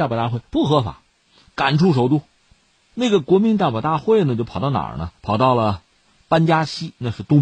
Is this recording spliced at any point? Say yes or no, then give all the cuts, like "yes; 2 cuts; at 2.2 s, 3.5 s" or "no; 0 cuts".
yes; 1 cut; at 5.2 s